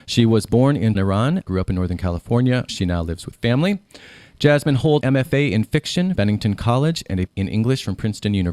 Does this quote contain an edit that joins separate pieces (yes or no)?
yes